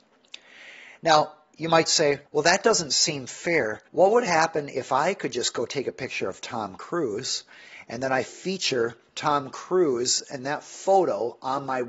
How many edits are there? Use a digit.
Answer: 3